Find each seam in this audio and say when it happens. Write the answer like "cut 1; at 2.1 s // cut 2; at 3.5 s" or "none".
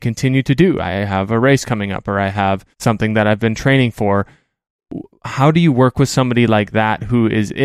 cut 1; at 2.7 s